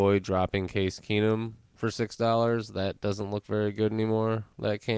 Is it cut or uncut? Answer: uncut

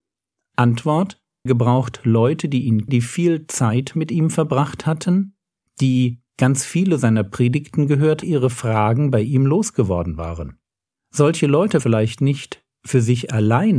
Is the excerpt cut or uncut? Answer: cut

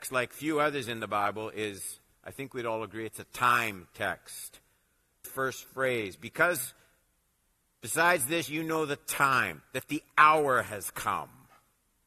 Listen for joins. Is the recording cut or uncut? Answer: cut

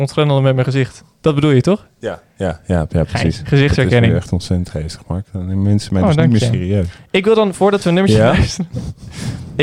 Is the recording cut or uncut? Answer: uncut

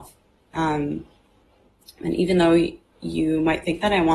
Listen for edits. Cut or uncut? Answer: uncut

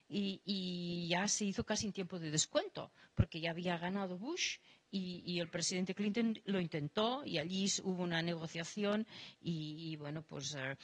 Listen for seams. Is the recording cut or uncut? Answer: uncut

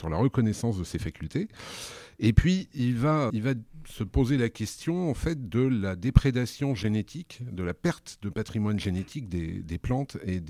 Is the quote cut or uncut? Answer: cut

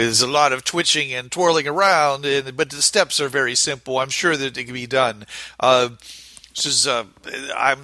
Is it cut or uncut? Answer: uncut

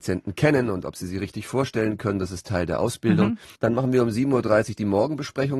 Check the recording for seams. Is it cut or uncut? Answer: cut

